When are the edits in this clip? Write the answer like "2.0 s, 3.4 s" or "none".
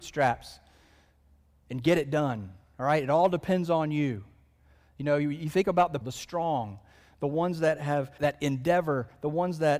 6.0 s, 8.2 s